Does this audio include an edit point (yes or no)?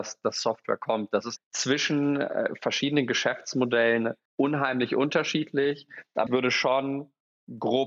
yes